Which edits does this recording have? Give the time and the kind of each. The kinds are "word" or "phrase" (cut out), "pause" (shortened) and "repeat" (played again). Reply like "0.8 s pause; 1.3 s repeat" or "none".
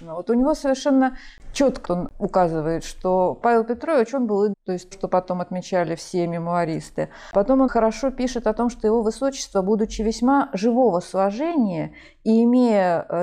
1.8 s word; 4.5 s word; 4.9 s word; 7.7 s word